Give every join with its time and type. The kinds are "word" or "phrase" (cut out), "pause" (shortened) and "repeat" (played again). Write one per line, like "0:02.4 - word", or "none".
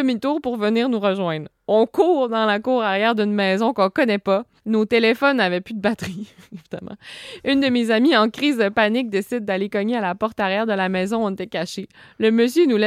0:04.6 - pause